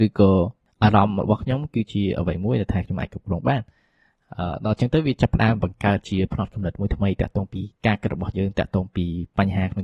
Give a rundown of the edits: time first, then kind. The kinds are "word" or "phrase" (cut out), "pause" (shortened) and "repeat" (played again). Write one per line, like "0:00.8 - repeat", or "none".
0:07.7 - pause